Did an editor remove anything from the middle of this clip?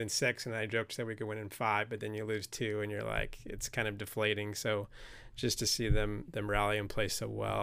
no; 0 cuts

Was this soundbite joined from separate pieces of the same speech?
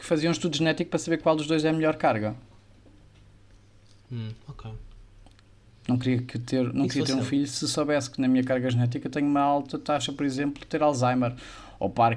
no; 0 cuts

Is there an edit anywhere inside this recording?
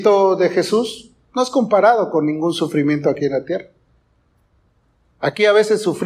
no; 0 cuts

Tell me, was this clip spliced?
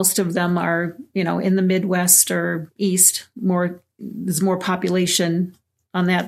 no; 0 cuts

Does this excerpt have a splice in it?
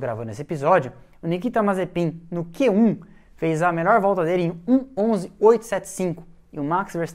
no; 0 cuts

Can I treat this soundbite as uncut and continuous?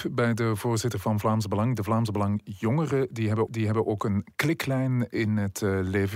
no; 1 cut; at 3.5 s

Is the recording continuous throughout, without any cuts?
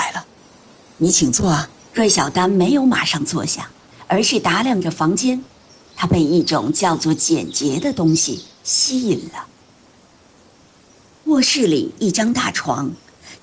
no; 1 cut; at 1.9 s

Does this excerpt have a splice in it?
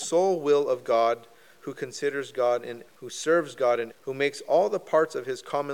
yes; 2 cuts; at 2.9 s, 3.9 s

